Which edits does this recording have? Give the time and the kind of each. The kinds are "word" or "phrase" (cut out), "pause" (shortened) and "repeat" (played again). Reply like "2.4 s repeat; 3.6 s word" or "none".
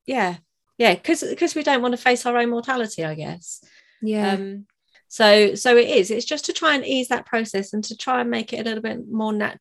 none